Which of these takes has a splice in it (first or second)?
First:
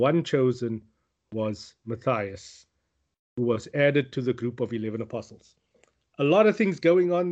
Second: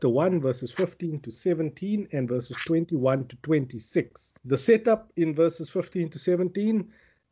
second